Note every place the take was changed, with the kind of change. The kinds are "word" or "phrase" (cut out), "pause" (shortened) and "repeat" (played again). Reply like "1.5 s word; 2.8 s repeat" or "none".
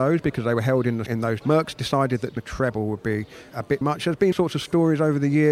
1.1 s word; 1.4 s word; 2.4 s word; 3.5 s word; 3.8 s word; 4.3 s word